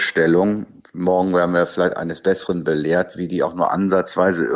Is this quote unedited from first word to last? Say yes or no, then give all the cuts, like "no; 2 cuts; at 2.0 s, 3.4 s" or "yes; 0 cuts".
yes; 0 cuts